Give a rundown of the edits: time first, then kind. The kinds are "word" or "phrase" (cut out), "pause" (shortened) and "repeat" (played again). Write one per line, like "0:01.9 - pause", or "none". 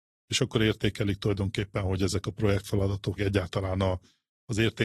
0:03.2 - word